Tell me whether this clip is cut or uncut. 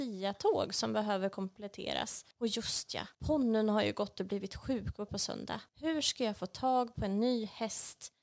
cut